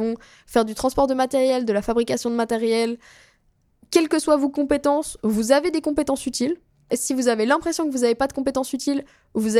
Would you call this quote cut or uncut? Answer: uncut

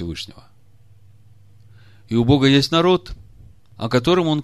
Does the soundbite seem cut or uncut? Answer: uncut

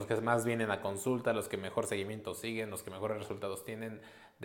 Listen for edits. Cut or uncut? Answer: uncut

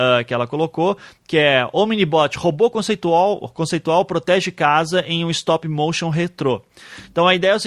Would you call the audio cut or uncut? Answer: uncut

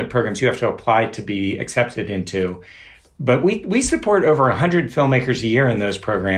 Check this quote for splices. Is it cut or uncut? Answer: uncut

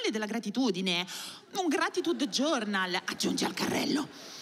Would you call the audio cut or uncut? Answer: uncut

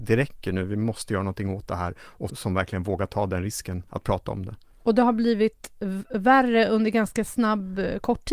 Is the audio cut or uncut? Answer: cut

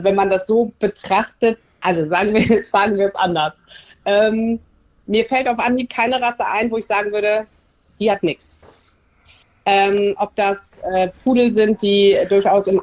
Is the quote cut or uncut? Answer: uncut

